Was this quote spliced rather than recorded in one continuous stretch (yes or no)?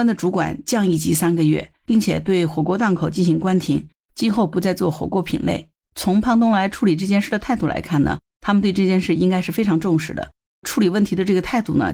yes